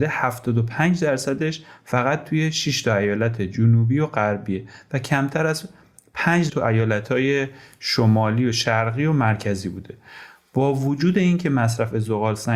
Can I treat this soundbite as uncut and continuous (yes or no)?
no